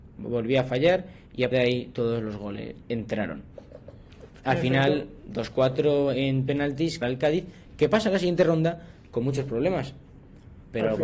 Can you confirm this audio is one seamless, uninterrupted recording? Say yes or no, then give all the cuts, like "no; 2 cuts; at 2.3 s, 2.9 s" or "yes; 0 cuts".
no; 3 cuts; at 1.5 s, 2.8 s, 7.0 s